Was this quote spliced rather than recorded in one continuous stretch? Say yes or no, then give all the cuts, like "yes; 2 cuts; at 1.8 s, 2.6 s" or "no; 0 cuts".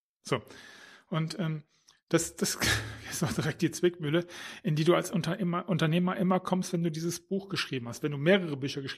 no; 0 cuts